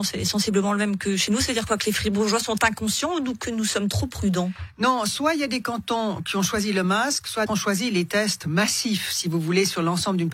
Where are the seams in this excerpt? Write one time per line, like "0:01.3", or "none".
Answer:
0:07.5